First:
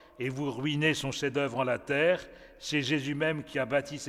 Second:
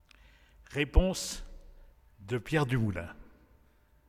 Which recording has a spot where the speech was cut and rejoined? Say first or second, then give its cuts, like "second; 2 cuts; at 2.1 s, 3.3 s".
second; 1 cut; at 1.9 s